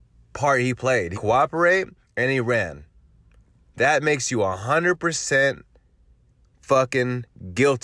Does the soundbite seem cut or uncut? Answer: cut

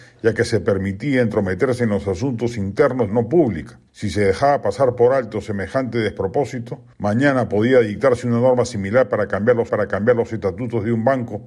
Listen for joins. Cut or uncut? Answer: cut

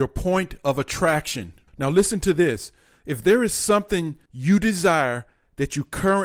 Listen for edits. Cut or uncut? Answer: uncut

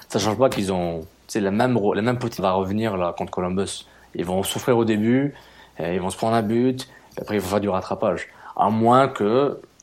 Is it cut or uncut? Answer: cut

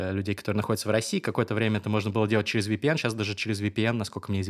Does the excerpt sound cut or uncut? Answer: uncut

